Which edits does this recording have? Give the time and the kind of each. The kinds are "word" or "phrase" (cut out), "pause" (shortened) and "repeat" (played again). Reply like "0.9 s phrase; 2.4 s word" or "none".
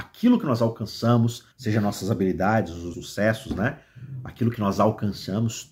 1.5 s pause; 2.9 s word